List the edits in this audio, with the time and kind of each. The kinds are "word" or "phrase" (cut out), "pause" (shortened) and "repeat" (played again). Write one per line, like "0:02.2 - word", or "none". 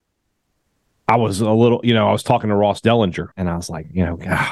0:03.3 - pause

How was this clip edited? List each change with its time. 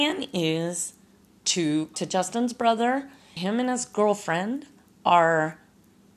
0:01.9 - word
0:03.4 - word

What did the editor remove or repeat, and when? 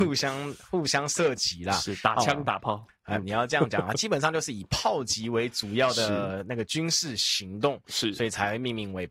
0:03.2 - phrase

